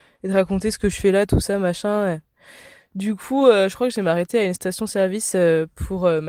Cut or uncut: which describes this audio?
uncut